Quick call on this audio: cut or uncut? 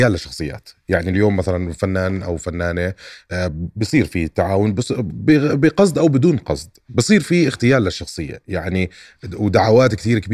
uncut